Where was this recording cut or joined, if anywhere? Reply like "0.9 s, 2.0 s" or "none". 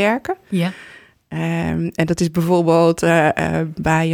none